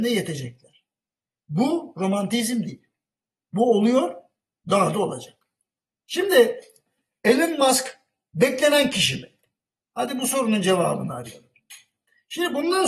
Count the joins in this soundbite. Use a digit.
0